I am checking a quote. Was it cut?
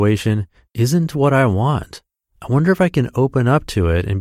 no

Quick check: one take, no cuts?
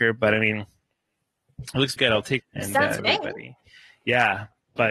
no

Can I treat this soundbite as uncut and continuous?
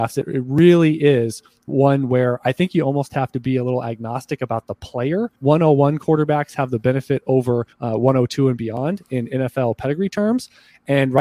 no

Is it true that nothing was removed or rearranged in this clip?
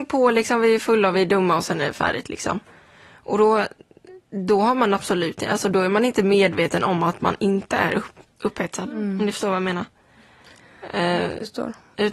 yes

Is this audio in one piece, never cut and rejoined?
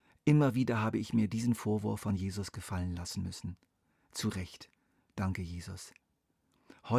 yes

